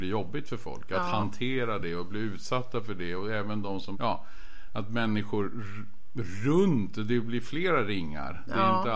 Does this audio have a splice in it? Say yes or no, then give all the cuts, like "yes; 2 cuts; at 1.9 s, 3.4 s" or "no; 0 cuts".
yes; 1 cut; at 3.9 s